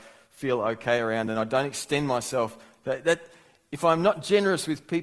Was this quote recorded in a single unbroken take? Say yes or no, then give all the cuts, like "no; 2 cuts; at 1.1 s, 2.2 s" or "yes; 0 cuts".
yes; 0 cuts